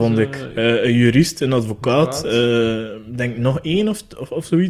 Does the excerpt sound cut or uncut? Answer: uncut